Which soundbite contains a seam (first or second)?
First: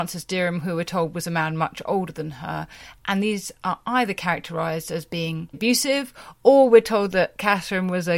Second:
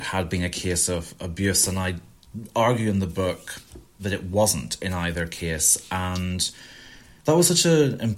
first